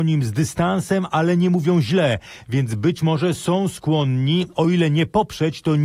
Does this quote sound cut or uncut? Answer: uncut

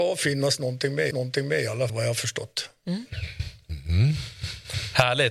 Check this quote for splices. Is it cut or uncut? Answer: cut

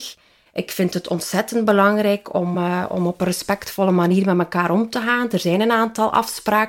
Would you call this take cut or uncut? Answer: uncut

